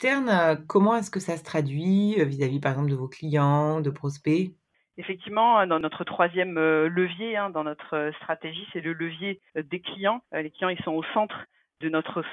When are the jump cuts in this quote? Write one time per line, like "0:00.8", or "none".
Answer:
0:04.7
0:09.5
0:10.2